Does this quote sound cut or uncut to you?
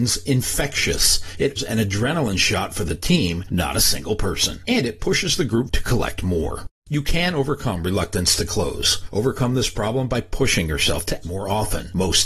cut